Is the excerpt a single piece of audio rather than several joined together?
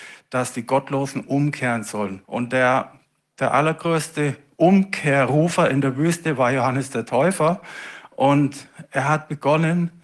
no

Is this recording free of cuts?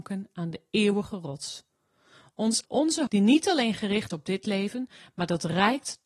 no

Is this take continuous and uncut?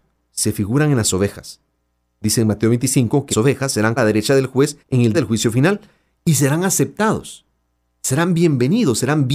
no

